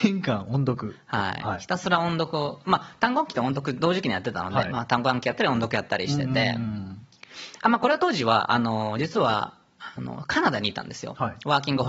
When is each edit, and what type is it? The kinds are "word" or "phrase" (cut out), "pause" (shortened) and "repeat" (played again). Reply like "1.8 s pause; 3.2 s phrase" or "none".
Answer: none